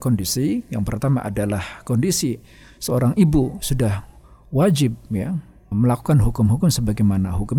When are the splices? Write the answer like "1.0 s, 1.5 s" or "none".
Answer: 5.7 s